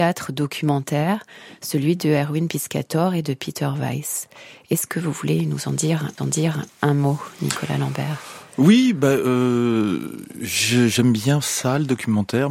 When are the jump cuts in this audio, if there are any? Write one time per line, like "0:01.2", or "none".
0:06.2